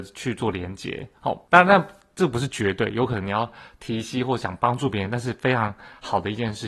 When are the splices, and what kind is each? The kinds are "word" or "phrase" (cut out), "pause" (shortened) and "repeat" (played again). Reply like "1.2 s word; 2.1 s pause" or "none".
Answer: 1.4 s pause